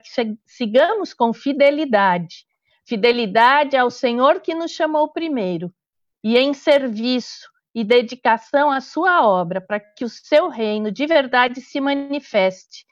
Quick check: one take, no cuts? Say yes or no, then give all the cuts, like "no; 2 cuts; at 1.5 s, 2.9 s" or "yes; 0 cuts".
yes; 0 cuts